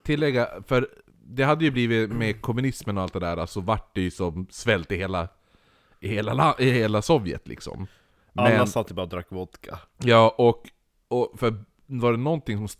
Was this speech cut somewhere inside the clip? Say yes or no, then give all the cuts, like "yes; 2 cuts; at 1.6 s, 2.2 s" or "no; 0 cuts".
no; 0 cuts